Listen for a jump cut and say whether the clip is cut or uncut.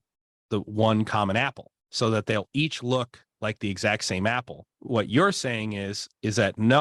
cut